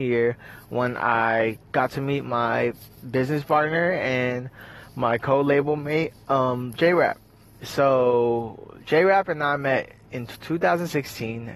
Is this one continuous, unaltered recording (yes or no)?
yes